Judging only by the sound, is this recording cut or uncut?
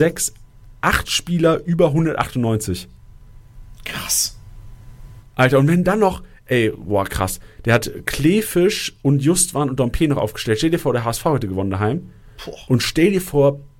uncut